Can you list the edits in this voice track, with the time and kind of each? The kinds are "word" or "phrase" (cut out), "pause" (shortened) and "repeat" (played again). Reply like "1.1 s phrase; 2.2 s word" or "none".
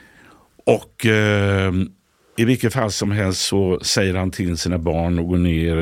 none